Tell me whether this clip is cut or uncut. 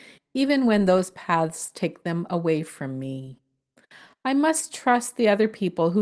uncut